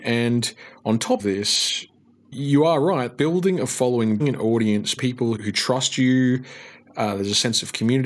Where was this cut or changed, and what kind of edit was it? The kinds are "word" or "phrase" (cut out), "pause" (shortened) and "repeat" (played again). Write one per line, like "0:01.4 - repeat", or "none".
0:01.2 - word
0:02.3 - word
0:03.2 - word
0:04.2 - word
0:05.0 - word
0:05.4 - word